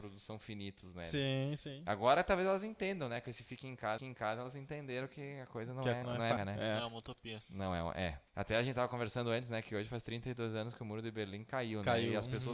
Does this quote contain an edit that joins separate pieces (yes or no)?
yes